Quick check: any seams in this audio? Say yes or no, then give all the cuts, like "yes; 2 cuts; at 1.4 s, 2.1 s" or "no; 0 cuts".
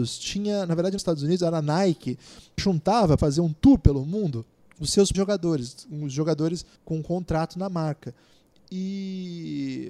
yes; 6 cuts; at 1.0 s, 2.6 s, 3.2 s, 4.6 s, 5.1 s, 6.8 s